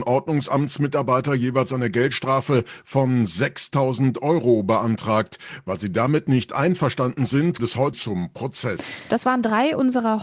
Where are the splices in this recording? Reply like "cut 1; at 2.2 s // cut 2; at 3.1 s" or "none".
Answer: cut 1; at 7.6 s // cut 2; at 7.9 s